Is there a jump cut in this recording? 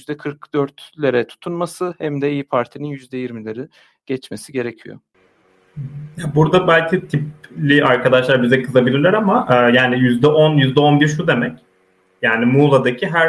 no; 0 cuts

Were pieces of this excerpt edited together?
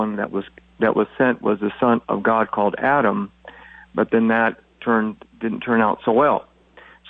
no; 0 cuts

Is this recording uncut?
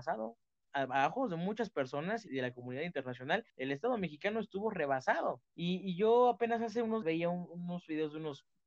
no; 4 cuts; at 2.3 s, 3.5 s, 5.5 s, 7.0 s

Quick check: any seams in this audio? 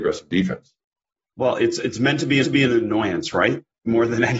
yes; 1 cut; at 2.4 s

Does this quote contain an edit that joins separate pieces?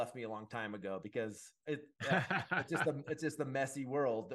no; 0 cuts

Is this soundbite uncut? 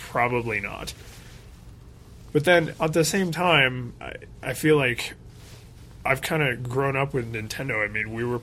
yes; 0 cuts

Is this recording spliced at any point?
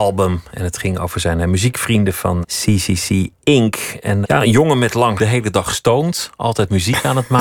yes; 3 cuts; at 2.4 s, 4.2 s, 5.2 s

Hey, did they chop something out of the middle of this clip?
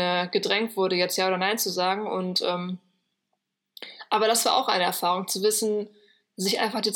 no; 0 cuts

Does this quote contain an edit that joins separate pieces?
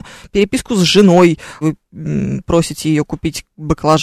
yes; 1 cut; at 1.6 s

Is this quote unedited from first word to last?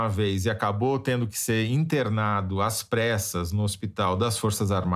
yes; 0 cuts

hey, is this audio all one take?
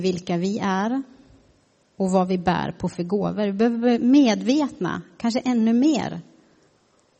yes; 0 cuts

